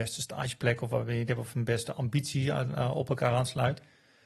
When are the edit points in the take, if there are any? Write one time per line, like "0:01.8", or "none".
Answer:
0:01.3